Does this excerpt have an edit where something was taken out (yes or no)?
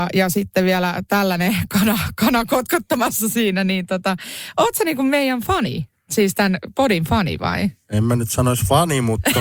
no